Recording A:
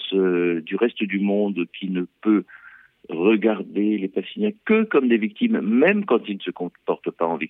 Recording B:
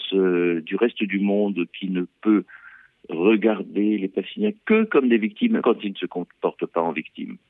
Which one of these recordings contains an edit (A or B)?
B